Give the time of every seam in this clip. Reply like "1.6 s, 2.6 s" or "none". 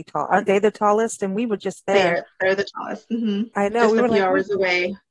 none